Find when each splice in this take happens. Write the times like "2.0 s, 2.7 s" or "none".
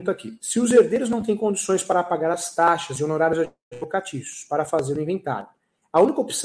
none